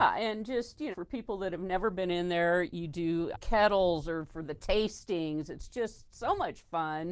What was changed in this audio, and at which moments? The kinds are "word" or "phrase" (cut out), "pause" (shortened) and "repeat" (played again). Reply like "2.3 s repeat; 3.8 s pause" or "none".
0.9 s word; 3.3 s phrase